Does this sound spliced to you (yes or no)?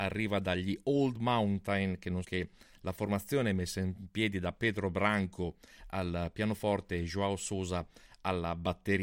yes